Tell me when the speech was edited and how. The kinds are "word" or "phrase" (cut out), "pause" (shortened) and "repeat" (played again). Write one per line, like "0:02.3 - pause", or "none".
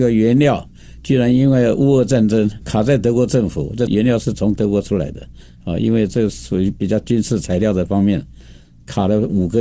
0:02.6 - word

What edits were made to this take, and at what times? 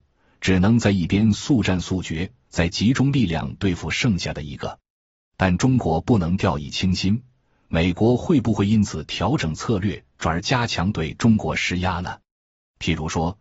none

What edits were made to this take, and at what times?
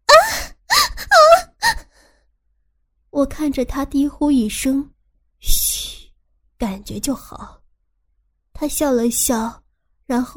0:04.9 - pause

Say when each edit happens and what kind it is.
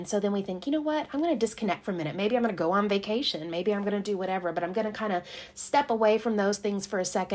none

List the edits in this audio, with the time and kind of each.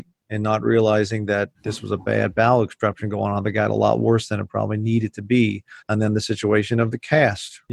0:01.5 - pause
0:05.8 - pause

